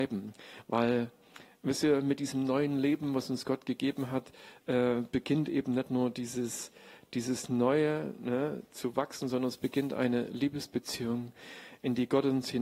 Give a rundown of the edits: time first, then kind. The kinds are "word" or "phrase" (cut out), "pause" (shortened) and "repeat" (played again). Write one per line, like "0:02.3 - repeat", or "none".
none